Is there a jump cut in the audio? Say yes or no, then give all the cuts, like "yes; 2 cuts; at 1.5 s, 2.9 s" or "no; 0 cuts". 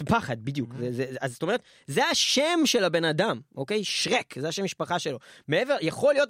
no; 0 cuts